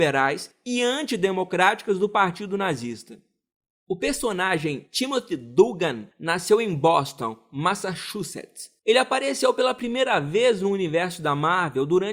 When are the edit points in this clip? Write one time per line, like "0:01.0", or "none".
0:08.8